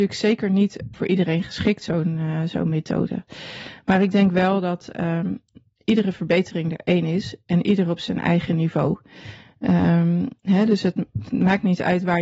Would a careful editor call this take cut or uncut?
cut